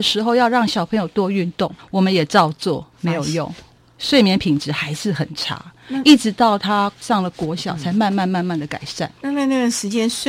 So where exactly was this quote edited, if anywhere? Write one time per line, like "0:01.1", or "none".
0:09.2